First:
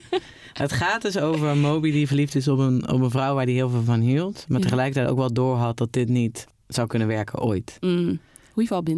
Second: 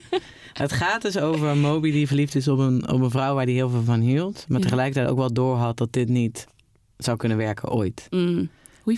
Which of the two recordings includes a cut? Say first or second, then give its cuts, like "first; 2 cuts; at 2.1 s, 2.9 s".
first; 1 cut; at 6.5 s